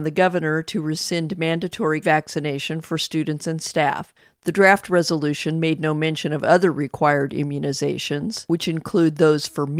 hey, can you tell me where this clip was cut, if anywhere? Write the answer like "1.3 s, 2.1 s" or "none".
2.0 s